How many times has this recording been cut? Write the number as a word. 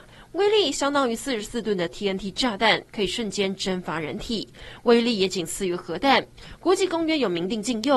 zero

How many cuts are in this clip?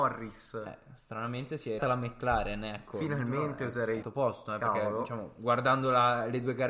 two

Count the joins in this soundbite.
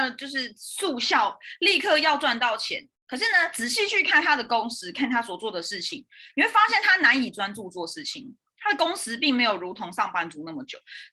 one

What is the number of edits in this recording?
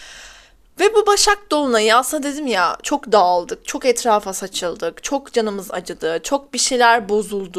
zero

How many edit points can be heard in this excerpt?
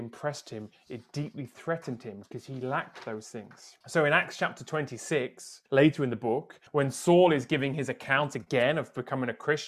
three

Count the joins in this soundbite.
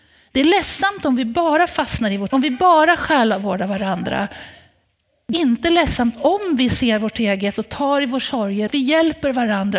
three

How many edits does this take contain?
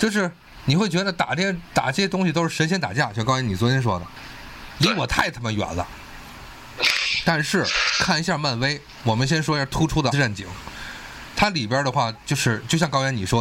one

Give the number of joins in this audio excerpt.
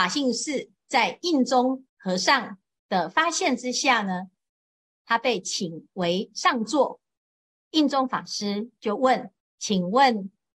two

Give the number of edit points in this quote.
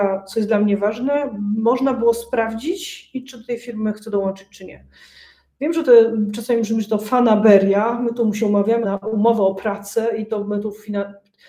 one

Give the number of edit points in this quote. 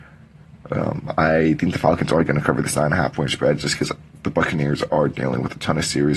zero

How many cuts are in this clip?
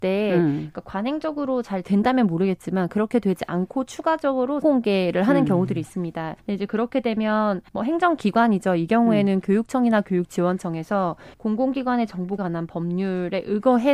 six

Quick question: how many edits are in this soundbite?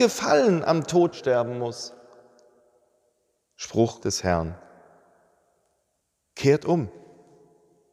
two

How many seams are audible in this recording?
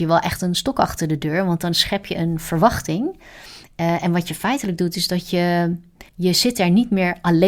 one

